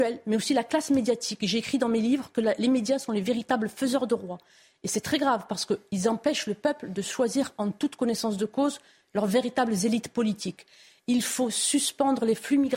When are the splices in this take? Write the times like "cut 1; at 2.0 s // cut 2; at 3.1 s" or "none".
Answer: none